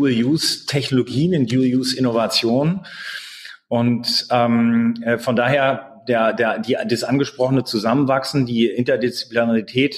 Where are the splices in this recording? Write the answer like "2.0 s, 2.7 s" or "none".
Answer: none